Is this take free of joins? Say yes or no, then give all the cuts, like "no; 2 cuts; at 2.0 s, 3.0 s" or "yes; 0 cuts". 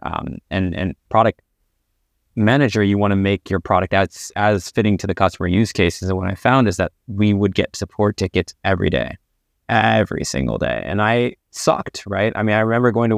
yes; 0 cuts